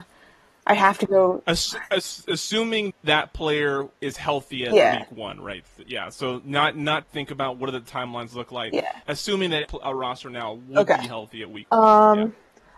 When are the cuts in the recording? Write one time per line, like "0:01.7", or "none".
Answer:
0:02.9
0:03.9
0:07.0
0:09.0
0:09.6